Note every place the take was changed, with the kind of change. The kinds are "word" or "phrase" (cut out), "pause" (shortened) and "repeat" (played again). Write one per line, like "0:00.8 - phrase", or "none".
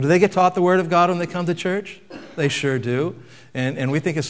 none